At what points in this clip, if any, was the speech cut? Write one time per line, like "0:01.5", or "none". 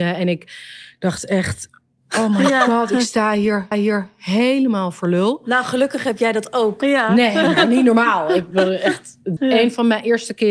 0:03.7
0:09.4